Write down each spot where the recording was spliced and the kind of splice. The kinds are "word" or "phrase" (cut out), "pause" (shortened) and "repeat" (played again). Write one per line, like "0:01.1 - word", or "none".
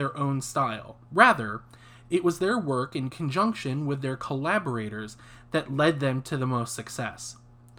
0:01.0 - pause